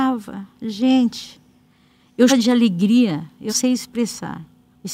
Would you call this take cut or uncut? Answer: cut